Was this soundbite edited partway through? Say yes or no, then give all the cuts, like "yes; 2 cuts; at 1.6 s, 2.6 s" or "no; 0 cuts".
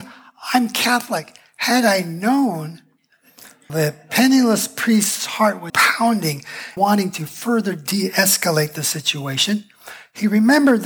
yes; 3 cuts; at 3.7 s, 5.7 s, 6.8 s